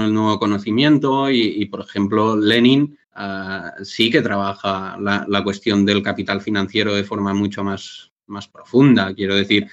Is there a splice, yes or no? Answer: yes